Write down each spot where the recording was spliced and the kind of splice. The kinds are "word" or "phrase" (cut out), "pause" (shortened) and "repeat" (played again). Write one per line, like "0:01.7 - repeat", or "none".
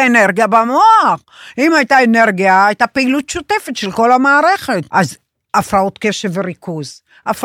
0:04.9 - pause